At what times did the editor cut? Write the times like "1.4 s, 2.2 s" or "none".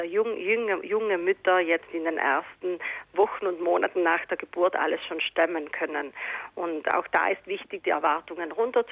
none

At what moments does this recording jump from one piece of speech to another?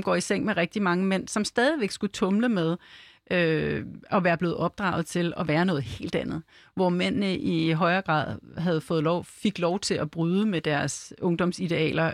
none

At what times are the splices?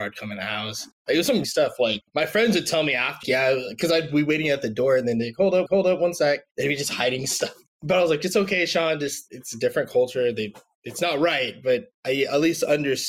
1.4 s, 3.2 s, 5.7 s

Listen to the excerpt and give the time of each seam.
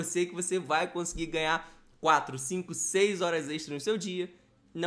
none

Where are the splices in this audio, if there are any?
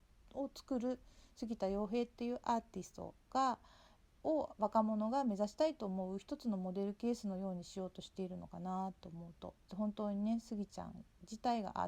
9.6 s

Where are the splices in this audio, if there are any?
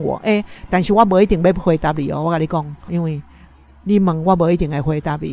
2.9 s

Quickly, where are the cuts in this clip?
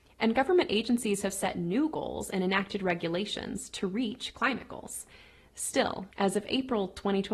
6.1 s

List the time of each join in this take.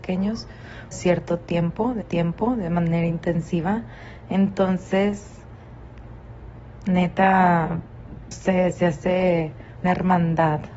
0.9 s, 2.0 s, 8.3 s, 9.8 s

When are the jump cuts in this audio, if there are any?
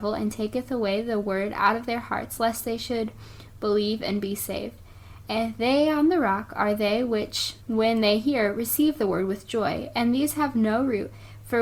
7.6 s

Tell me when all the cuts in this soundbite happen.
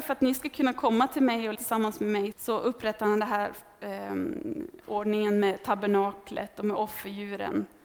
1.5 s, 2.3 s

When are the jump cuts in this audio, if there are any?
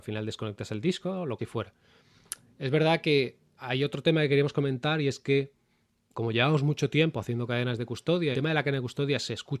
1.4 s, 3.6 s, 6.1 s, 8.3 s

